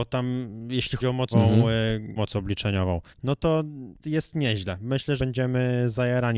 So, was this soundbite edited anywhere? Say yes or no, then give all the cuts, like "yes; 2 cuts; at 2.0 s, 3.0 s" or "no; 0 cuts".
yes; 6 cuts; at 1.0 s, 1.3 s, 2.2 s, 3.1 s, 4.0 s, 5.2 s